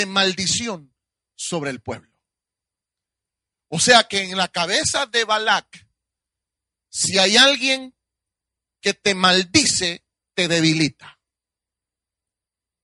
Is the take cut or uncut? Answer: uncut